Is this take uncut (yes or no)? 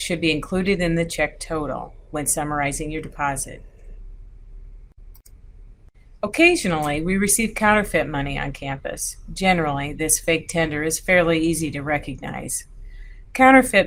yes